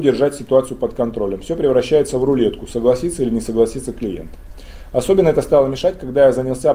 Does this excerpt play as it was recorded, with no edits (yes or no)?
yes